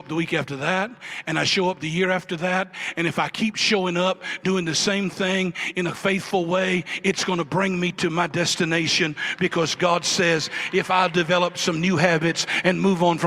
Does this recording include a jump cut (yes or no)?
no